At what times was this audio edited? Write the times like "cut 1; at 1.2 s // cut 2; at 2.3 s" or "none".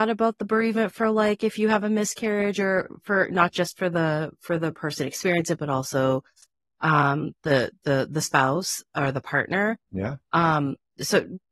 none